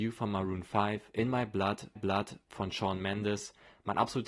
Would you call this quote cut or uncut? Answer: cut